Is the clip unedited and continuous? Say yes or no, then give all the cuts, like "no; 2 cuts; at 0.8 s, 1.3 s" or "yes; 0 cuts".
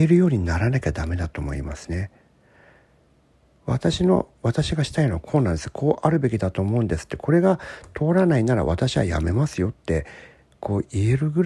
yes; 0 cuts